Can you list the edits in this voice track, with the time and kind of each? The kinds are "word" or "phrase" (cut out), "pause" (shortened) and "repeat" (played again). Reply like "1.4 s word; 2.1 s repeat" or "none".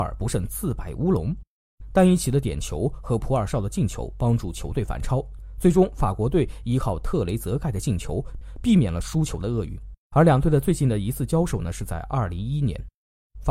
10.0 s pause

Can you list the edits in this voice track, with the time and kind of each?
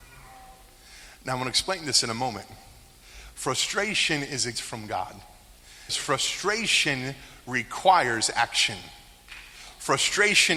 4.5 s word; 5.9 s word

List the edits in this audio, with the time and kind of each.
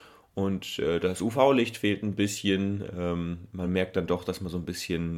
none

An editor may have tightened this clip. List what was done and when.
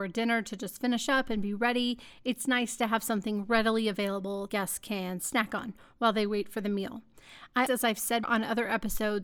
4.5 s word; 7.7 s word; 8.2 s word

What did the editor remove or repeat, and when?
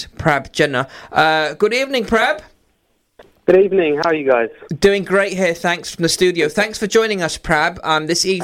none

